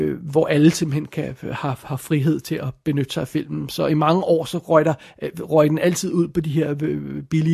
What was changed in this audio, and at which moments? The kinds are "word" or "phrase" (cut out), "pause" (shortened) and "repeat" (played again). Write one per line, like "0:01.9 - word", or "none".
none